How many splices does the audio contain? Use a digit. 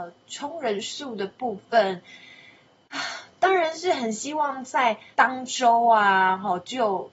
1